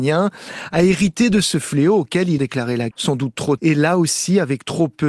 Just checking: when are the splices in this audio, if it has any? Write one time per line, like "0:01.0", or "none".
0:02.4
0:02.9
0:03.6